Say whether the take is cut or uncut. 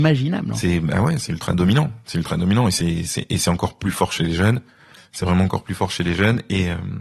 uncut